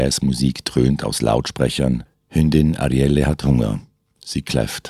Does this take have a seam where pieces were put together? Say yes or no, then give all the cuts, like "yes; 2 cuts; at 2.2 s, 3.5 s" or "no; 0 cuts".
no; 0 cuts